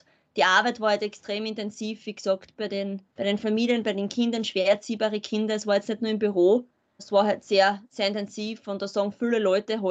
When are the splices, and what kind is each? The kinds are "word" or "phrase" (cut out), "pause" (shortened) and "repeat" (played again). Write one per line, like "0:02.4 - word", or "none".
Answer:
0:03.1 - pause
0:07.0 - word